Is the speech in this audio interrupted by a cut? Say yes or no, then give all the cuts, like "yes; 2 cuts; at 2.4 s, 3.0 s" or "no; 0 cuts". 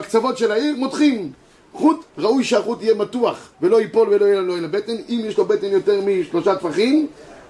yes; 2 cuts; at 2.1 s, 3.5 s